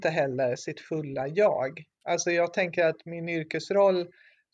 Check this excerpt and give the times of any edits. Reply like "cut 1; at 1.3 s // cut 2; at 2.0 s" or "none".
none